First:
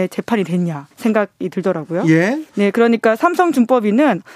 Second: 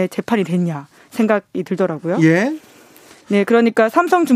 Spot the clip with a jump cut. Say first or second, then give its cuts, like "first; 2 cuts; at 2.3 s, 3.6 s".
first; 2 cuts; at 0.9 s, 2.5 s